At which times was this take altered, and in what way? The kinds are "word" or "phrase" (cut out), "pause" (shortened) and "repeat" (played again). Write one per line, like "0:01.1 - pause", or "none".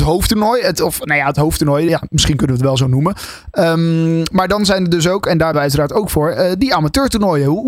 0:01.9 - word
0:05.5 - word